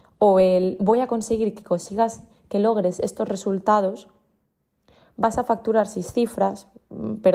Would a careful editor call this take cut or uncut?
uncut